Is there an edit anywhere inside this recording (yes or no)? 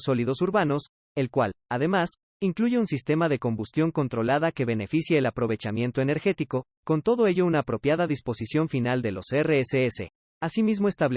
no